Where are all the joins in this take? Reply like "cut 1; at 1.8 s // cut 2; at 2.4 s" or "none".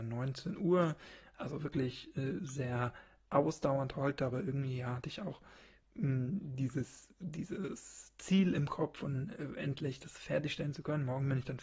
none